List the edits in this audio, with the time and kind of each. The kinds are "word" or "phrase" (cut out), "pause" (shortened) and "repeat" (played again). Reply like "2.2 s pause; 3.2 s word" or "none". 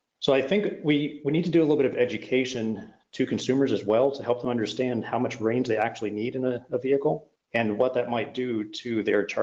7.4 s pause